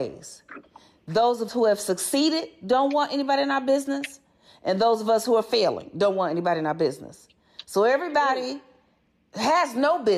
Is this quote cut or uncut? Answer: cut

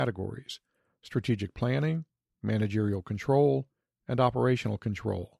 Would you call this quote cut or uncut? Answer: uncut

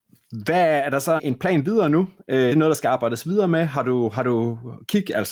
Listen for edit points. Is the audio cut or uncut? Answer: cut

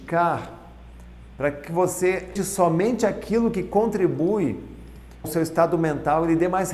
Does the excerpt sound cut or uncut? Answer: cut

